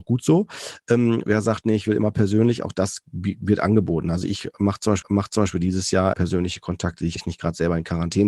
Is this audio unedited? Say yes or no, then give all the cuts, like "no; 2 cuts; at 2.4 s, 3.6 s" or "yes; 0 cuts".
no; 4 cuts; at 1.3 s, 5.0 s, 6.1 s, 7.2 s